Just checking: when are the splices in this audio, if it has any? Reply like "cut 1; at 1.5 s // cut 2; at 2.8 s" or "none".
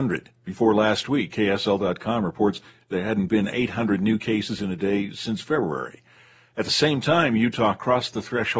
none